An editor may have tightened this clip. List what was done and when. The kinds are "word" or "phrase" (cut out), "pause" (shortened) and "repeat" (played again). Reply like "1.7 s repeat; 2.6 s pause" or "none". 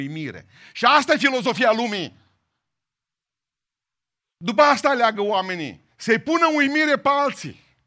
none